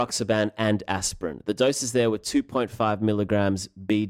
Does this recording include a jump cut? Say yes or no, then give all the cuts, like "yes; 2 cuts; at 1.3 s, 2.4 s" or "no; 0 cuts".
no; 0 cuts